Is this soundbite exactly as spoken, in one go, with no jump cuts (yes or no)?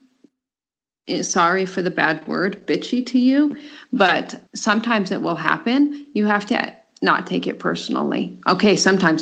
no